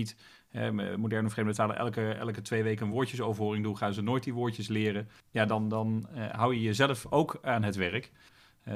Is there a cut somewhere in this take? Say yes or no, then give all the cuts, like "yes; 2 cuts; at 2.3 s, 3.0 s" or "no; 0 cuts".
no; 0 cuts